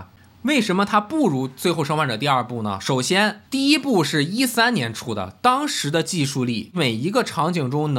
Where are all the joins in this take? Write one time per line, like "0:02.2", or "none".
0:03.5